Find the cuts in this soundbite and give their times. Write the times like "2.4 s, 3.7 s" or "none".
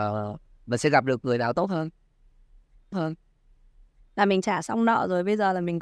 2.9 s